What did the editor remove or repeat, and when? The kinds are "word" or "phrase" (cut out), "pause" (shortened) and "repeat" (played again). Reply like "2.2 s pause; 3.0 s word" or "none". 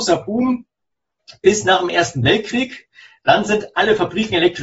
none